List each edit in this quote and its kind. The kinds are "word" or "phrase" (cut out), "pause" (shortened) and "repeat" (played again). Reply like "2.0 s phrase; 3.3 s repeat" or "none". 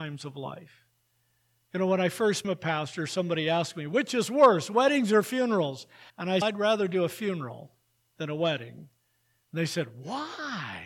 2.4 s word; 6.1 s pause; 6.4 s phrase